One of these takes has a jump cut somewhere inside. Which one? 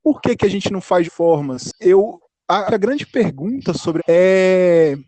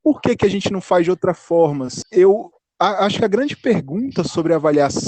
first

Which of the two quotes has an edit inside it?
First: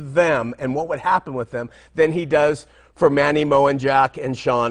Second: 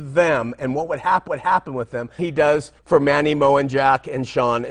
second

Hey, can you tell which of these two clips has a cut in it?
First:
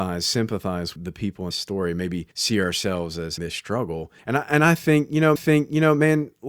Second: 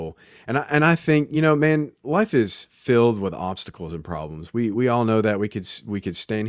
first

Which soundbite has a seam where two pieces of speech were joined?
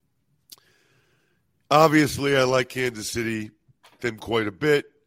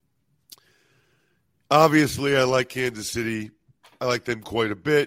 first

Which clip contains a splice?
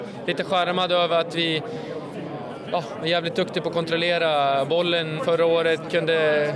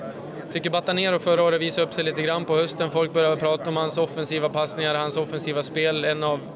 first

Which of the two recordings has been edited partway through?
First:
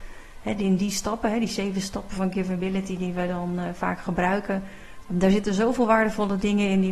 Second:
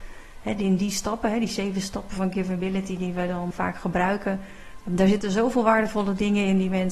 second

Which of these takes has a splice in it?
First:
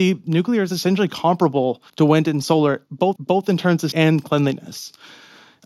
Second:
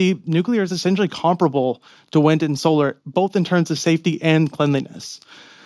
first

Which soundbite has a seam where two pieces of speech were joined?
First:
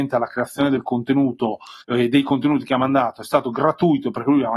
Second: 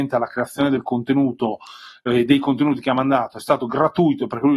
first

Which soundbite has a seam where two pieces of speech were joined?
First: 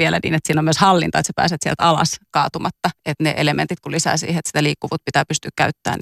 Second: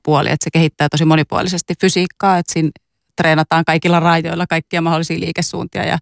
first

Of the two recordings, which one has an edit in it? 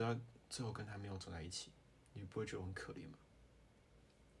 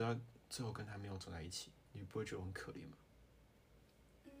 second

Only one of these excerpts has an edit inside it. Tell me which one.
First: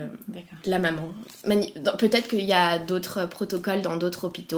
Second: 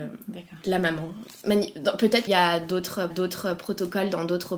second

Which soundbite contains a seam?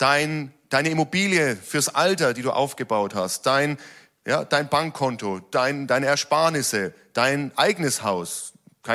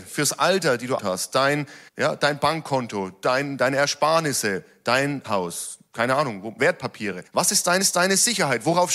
second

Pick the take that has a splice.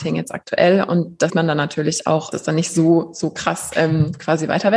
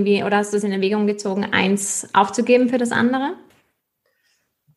first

